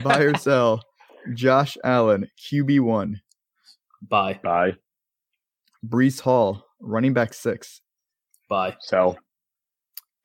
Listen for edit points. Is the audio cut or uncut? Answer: uncut